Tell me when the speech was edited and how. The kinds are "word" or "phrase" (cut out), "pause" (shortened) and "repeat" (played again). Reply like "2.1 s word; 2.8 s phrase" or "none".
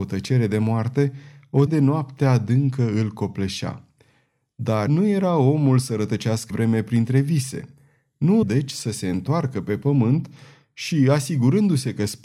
1.7 s word; 4.9 s word; 6.5 s word; 8.4 s word